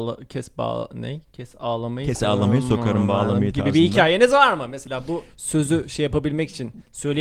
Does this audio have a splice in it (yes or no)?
no